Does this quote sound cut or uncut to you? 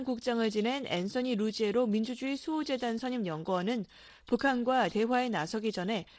uncut